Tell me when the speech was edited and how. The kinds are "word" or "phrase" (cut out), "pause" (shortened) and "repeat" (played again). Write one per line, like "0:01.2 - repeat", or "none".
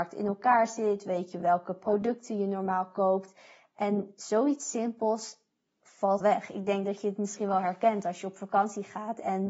0:06.2 - word